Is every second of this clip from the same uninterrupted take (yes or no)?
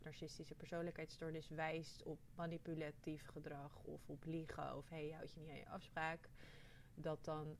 yes